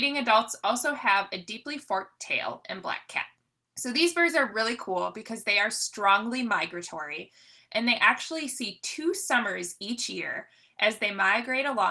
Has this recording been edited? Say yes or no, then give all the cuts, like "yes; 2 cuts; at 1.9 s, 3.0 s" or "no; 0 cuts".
no; 0 cuts